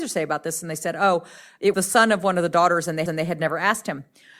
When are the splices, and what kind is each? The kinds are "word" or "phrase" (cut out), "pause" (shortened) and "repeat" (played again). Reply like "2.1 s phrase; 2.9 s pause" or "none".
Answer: 1.7 s word; 3.1 s repeat